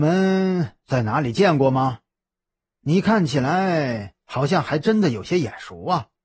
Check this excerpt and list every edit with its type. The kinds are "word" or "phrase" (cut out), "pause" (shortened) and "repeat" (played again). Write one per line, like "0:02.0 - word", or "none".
none